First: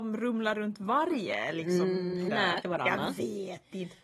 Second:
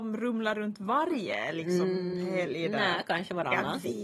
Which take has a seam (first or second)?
first